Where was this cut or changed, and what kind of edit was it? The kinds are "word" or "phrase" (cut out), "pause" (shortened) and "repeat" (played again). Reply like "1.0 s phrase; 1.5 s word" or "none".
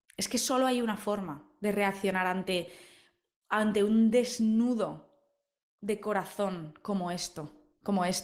none